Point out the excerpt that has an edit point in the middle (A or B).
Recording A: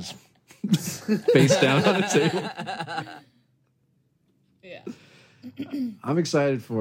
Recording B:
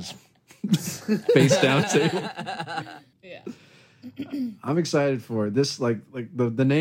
B